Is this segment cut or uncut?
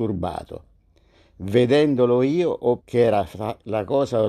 cut